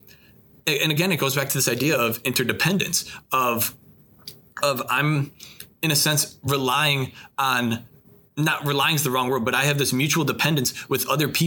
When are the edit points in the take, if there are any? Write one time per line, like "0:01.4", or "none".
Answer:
none